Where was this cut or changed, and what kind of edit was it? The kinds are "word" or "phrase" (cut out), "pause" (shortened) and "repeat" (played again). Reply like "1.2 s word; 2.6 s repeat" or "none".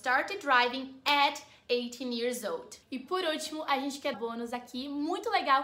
4.1 s phrase